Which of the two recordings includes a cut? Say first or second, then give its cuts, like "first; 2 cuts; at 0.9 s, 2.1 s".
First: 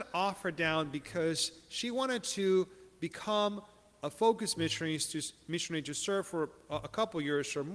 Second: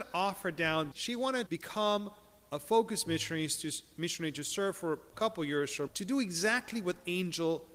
second; 4 cuts; at 0.9 s, 1.5 s, 5.1 s, 5.9 s